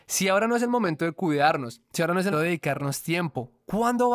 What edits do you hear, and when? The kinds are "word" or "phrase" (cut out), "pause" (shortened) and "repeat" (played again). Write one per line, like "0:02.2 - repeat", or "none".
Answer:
0:02.3 - word